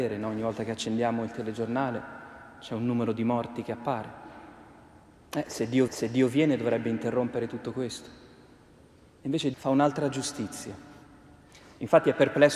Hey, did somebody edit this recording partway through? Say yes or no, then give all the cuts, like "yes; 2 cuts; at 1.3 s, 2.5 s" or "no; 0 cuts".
yes; 2 cuts; at 5.9 s, 9.5 s